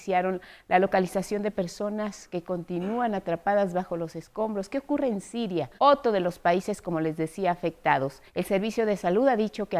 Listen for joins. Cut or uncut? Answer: cut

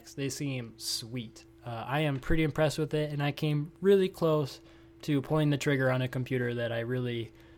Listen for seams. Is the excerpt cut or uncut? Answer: uncut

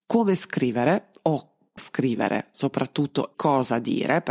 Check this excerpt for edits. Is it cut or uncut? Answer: cut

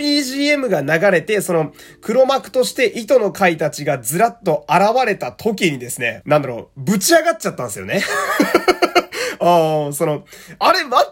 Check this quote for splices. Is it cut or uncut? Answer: cut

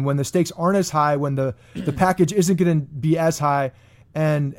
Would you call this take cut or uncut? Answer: uncut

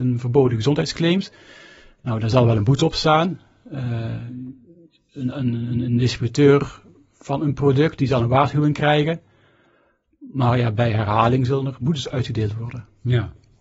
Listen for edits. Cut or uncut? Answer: uncut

